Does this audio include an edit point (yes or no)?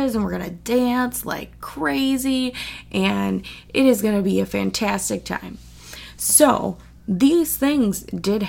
no